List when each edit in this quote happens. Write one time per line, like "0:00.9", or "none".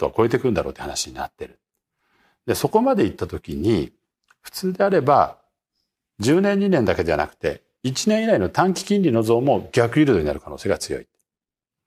none

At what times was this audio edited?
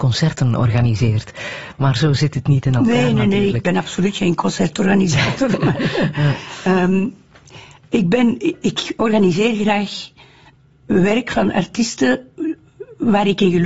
none

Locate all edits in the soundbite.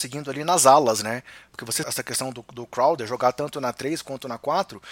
0:01.8

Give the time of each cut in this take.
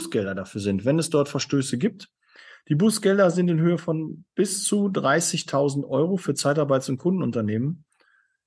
none

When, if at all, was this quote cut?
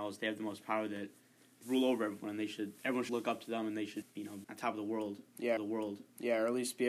0:01.6
0:02.8
0:03.1
0:04.0
0:04.4
0:05.6

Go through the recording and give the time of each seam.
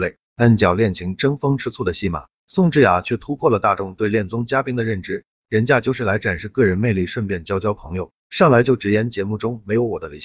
none

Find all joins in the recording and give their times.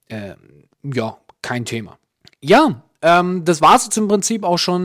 0:02.2

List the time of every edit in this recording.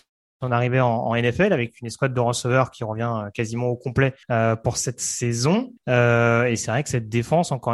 0:04.2
0:05.8

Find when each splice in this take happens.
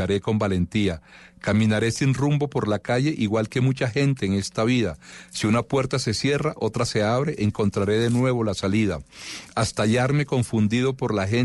none

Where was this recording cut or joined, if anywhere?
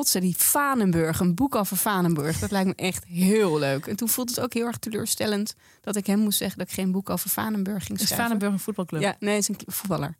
none

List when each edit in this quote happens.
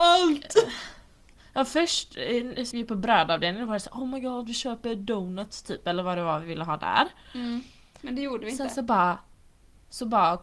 0:02.7

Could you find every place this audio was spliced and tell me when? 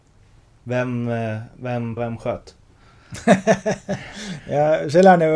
0:02.0

